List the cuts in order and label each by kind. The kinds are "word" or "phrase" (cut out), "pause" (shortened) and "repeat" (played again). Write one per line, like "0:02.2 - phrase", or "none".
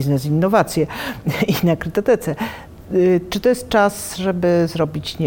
none